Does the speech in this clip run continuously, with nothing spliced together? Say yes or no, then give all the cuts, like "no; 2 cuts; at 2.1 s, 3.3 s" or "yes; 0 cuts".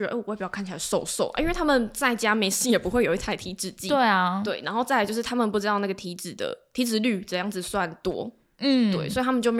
yes; 0 cuts